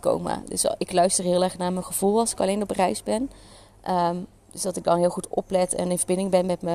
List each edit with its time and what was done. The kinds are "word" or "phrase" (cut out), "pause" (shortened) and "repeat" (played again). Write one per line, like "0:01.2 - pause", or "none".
none